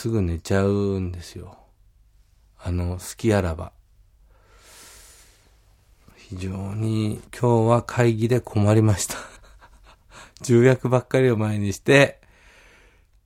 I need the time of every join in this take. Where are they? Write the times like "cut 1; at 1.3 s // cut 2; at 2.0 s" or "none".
cut 1; at 7.2 s // cut 2; at 9.4 s